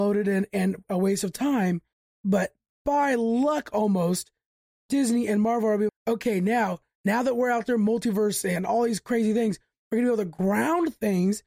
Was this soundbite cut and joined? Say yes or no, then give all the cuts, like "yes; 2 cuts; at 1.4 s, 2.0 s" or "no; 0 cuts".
yes; 2 cuts; at 1.9 s, 5.9 s